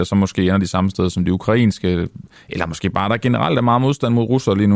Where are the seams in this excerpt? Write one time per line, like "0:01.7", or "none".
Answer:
0:02.4